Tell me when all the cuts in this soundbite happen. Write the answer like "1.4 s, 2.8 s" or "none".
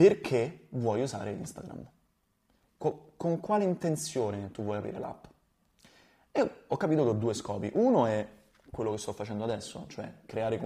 none